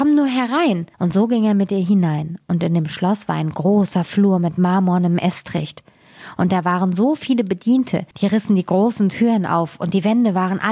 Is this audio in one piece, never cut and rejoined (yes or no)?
no